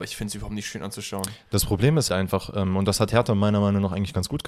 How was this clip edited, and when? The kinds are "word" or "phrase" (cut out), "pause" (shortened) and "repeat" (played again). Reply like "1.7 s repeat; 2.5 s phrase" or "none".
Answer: 2.1 s word